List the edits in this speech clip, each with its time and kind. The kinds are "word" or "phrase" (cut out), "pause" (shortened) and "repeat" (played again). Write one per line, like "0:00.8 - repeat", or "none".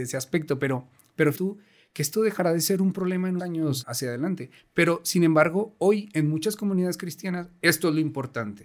0:01.3 - word
0:03.4 - word
0:03.8 - word